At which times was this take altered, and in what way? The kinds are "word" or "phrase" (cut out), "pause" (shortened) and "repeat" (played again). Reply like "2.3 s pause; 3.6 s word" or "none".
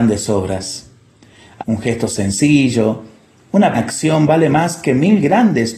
1.6 s word; 3.7 s word